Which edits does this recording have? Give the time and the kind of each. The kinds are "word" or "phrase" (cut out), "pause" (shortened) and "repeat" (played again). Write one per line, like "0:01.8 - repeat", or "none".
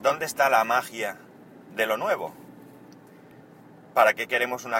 none